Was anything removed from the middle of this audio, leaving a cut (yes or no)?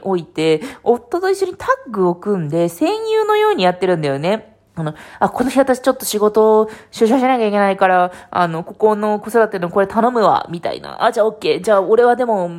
yes